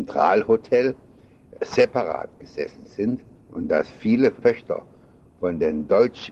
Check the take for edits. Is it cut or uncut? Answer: uncut